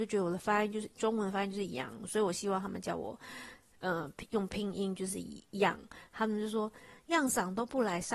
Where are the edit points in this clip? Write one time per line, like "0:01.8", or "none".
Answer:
none